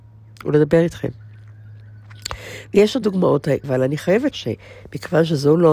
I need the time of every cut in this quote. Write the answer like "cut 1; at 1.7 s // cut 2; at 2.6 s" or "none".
cut 1; at 3.0 s // cut 2; at 3.6 s // cut 3; at 4.3 s